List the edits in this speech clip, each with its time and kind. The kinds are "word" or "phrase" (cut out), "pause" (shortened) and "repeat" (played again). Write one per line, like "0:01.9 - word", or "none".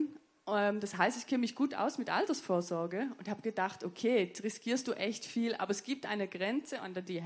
none

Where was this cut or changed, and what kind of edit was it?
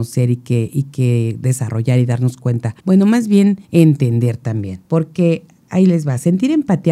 0:02.8 - pause
0:03.6 - pause
0:04.8 - pause

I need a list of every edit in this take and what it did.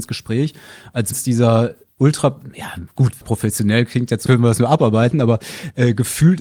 0:01.1 - word
0:03.2 - word
0:04.3 - word

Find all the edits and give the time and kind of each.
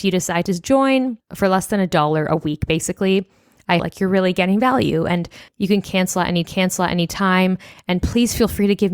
0:03.8 - phrase
0:06.4 - repeat

